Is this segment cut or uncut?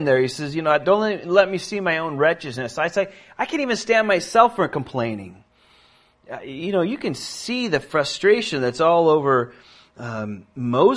uncut